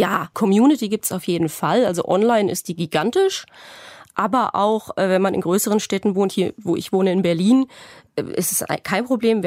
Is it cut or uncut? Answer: uncut